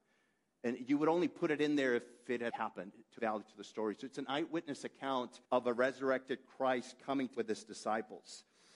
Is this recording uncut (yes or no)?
no